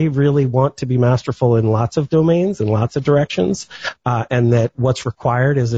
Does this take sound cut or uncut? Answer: uncut